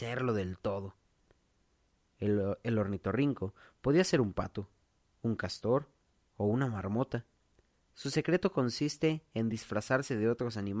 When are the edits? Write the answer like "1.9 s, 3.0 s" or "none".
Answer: none